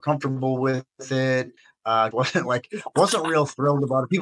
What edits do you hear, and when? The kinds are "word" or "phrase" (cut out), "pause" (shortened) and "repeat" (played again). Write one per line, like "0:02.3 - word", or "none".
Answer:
0:02.1 - phrase